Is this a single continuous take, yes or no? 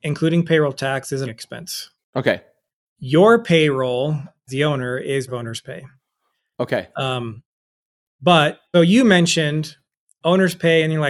no